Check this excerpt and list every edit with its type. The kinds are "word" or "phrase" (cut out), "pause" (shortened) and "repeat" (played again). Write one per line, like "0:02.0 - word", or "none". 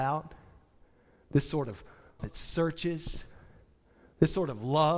0:02.2 - word